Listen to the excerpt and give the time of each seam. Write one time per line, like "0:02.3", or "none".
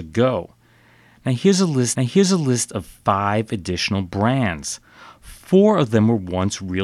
0:02.0